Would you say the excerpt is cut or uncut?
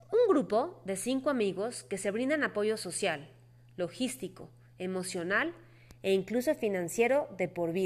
uncut